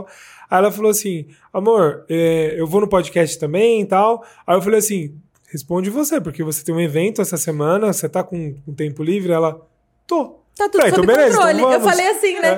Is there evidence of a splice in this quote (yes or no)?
no